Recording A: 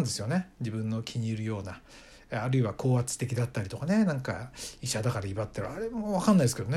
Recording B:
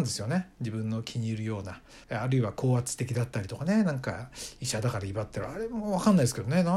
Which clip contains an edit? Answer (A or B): B